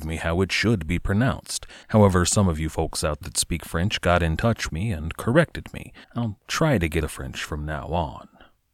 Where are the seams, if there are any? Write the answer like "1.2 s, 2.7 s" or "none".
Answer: 1.8 s, 3.2 s, 4.7 s, 6.0 s, 7.0 s